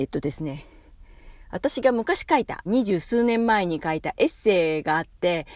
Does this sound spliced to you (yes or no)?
yes